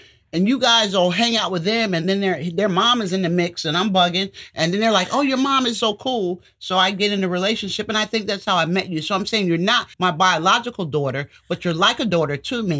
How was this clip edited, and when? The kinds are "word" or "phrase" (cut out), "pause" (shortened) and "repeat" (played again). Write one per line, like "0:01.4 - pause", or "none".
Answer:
0:05.8 - word
0:09.9 - pause